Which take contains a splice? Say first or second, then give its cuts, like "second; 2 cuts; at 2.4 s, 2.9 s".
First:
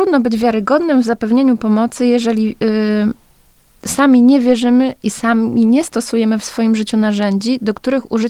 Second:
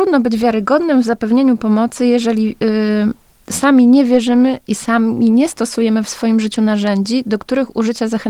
second; 1 cut; at 3.3 s